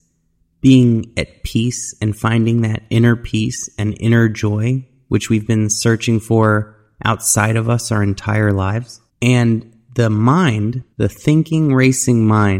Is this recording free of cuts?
no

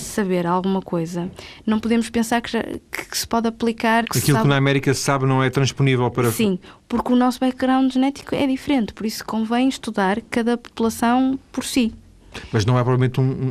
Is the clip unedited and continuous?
no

